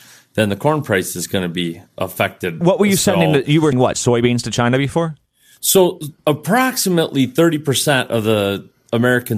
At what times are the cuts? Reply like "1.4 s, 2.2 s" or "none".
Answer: 1.9 s, 3.7 s, 6.2 s